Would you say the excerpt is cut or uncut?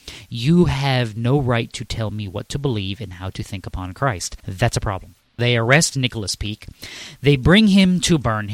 cut